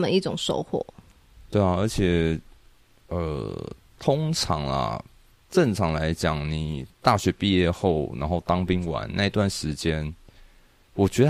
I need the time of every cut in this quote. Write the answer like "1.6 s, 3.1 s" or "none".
none